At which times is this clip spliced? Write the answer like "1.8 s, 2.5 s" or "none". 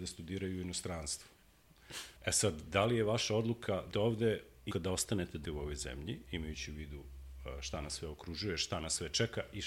2.2 s, 3.9 s, 4.7 s, 5.4 s